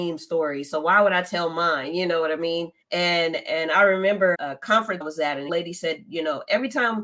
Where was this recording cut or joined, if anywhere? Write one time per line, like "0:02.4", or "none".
0:02.8
0:04.3
0:05.0
0:05.5